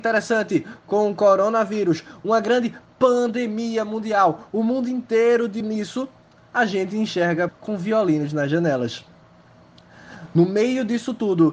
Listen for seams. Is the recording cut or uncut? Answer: cut